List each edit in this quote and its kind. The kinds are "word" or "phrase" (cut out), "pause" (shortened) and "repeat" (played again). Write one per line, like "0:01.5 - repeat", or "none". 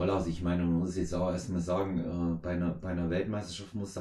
none